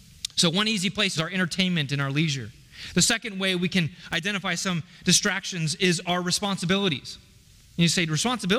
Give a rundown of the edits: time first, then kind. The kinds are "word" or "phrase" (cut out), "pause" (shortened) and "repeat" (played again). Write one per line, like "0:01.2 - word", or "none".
0:01.2 - phrase